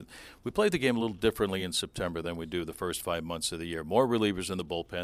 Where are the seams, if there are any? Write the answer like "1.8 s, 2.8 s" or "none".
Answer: none